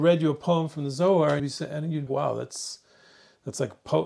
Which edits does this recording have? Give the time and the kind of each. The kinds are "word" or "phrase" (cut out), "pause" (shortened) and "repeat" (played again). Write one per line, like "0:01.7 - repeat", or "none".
0:01.4 - word
0:02.1 - phrase